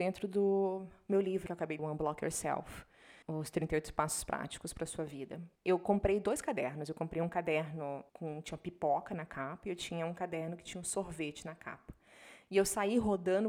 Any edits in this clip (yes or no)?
yes